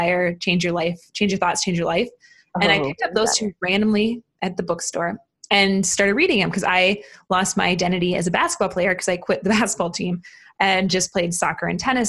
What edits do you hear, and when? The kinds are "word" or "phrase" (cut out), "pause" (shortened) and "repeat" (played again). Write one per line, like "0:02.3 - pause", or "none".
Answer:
none

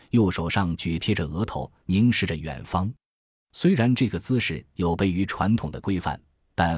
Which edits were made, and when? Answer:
none

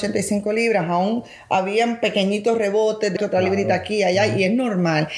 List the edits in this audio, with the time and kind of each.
0:03.2 - word

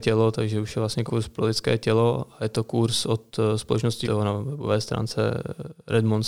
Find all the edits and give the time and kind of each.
0:01.1 - word
0:04.0 - phrase

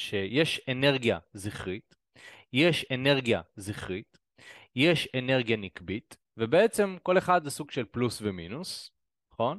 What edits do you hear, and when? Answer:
0:02.9 - repeat
0:06.3 - pause

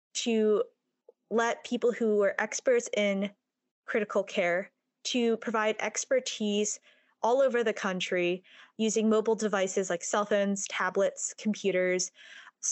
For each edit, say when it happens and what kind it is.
none

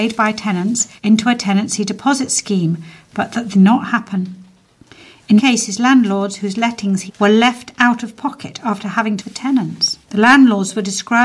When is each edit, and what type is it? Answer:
0:01.0 - pause
0:03.5 - phrase
0:05.4 - word
0:07.1 - word
0:09.2 - phrase
0:10.0 - pause

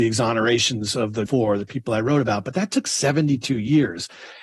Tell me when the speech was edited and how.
0:01.3 - word

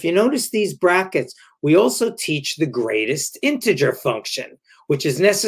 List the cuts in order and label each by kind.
none

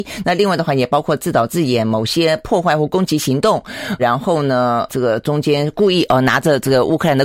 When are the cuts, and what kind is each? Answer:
0:04.0 - word
0:04.9 - word

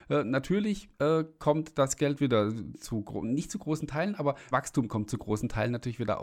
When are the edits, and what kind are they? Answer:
0:00.9 - pause
0:04.5 - word

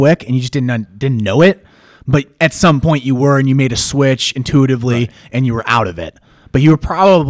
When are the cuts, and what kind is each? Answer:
none

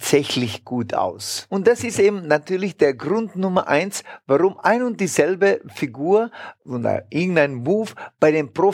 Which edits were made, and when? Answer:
0:06.6 - pause

